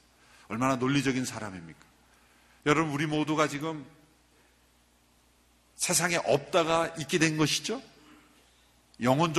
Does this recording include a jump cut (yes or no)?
no